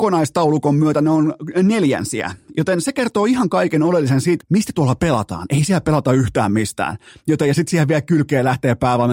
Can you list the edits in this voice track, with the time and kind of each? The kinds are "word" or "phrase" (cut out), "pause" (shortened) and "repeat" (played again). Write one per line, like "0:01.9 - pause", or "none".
0:04.4 - word